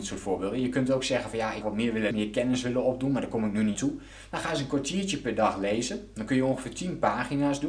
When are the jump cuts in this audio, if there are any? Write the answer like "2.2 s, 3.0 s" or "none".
1.6 s, 2.1 s, 3.7 s